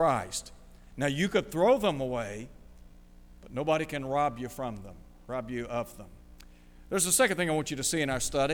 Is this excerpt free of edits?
yes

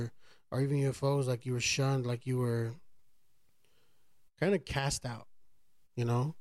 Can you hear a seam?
no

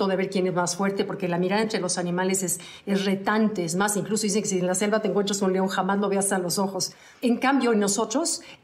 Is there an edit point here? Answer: no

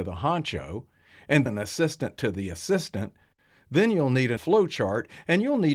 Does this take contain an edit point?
yes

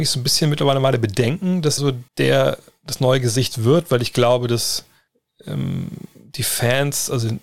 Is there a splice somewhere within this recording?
yes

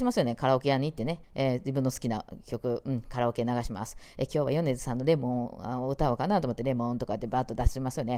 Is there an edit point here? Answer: yes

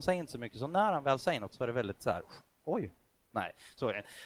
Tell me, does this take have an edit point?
no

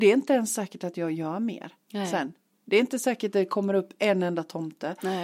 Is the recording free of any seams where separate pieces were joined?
yes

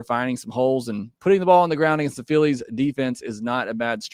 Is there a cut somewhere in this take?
no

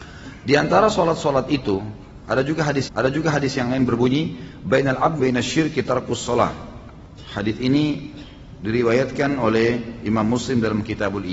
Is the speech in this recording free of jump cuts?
no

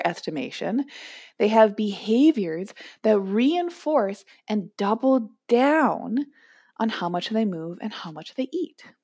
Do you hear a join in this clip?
no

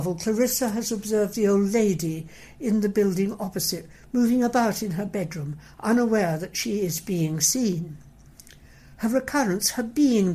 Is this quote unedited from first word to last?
yes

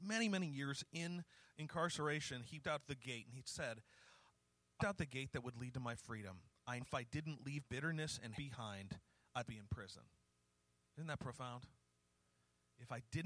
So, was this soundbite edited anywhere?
yes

